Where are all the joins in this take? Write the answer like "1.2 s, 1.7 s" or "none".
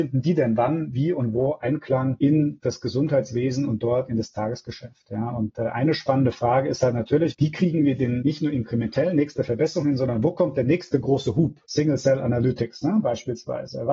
none

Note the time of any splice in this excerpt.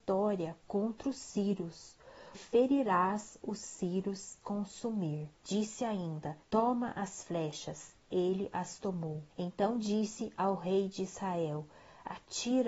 2.3 s, 4.4 s, 5.4 s, 6.4 s, 9.3 s

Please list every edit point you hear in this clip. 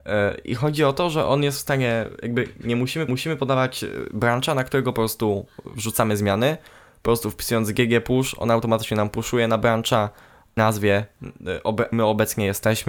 3.1 s, 10.6 s, 11.9 s

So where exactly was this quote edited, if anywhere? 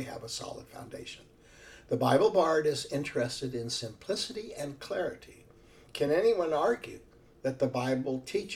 none

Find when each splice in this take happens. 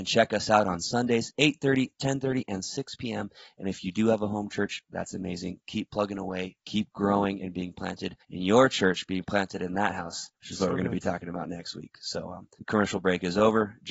8.2 s, 10.4 s, 12.6 s

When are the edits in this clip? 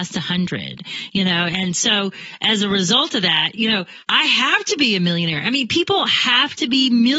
4.0 s

